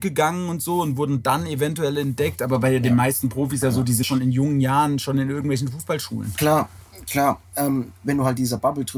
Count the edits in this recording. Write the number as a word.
two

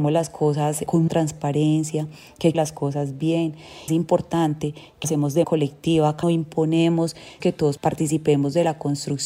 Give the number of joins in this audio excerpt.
seven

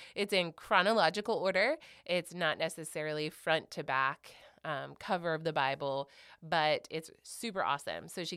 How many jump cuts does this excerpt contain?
zero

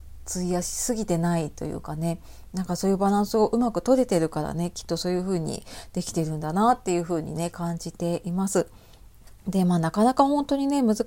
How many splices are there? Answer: one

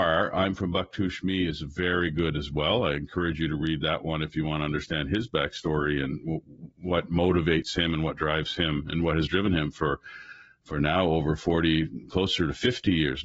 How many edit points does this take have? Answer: zero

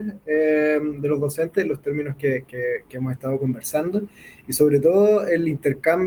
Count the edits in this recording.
zero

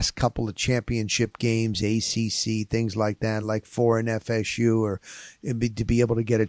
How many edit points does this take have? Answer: zero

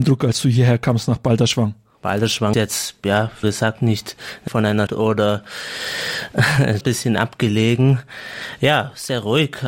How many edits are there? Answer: five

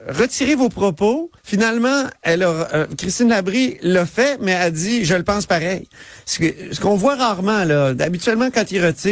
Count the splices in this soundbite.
one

